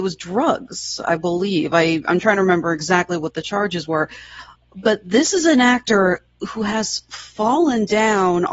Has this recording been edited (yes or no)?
no